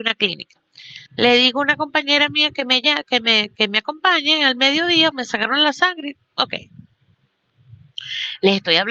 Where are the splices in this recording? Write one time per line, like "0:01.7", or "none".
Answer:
0:01.1
0:05.1
0:06.1